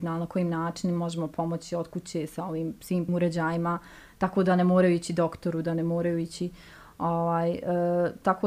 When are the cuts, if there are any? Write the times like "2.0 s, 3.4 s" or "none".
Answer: 3.1 s